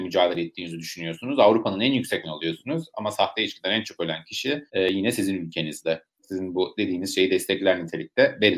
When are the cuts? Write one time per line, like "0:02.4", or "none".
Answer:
0:02.2
0:04.7